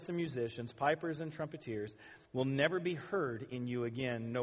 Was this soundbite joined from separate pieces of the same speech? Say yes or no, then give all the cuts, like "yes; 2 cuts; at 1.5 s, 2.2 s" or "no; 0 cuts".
yes; 1 cut; at 2.3 s